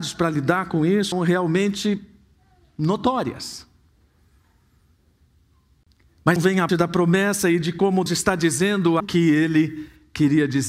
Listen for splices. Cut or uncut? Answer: cut